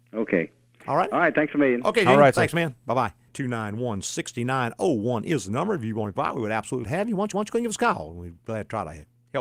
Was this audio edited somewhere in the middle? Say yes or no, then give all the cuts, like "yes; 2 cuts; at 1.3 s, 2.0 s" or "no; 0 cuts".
yes; 3 cuts; at 6.2 s, 6.8 s, 7.3 s